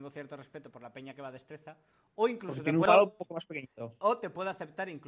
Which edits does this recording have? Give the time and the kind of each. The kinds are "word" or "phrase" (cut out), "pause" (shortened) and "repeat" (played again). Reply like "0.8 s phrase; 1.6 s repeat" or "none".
none